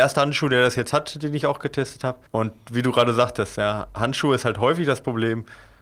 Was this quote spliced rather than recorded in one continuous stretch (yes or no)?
yes